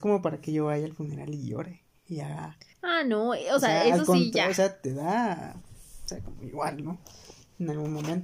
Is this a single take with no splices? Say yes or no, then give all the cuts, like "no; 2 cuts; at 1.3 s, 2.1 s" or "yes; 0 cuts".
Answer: no; 1 cut; at 2.7 s